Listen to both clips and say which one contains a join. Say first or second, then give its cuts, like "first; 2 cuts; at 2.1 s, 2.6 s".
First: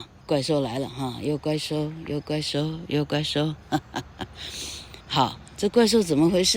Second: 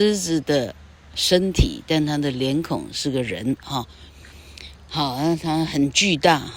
first; 1 cut; at 5.0 s